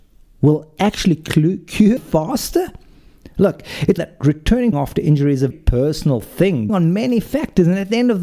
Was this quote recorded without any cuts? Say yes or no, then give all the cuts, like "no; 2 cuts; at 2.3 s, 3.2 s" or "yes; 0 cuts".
no; 5 cuts; at 2.0 s, 4.0 s, 4.7 s, 5.5 s, 6.7 s